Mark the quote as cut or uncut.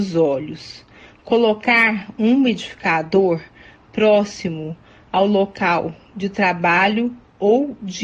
uncut